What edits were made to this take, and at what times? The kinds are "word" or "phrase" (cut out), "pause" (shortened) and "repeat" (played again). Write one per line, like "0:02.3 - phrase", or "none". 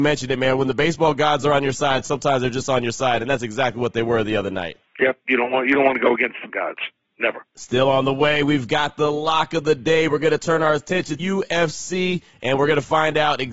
0:06.5 - word
0:11.2 - phrase